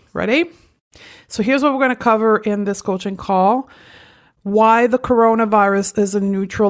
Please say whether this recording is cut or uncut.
uncut